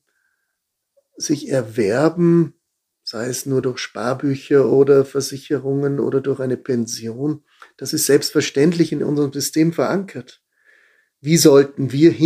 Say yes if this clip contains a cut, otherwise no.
no